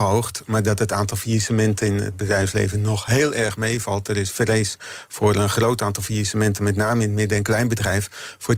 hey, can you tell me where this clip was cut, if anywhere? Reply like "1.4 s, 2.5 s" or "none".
none